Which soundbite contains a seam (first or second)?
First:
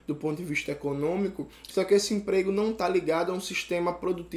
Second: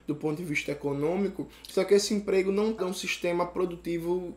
second